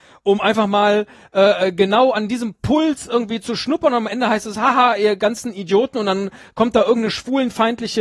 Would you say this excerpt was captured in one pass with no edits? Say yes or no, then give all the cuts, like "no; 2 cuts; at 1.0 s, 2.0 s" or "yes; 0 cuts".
yes; 0 cuts